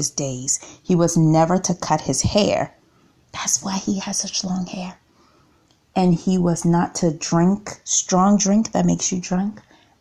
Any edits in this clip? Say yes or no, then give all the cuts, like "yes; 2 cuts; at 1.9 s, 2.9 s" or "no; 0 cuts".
no; 0 cuts